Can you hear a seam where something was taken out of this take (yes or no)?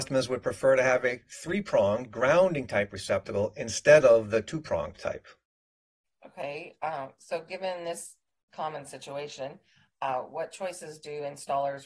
no